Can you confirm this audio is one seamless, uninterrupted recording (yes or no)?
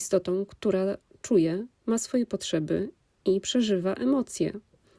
yes